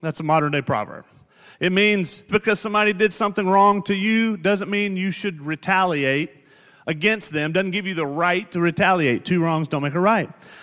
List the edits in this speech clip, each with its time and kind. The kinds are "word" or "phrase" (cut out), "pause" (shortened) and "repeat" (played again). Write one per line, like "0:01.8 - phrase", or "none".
0:02.3 - word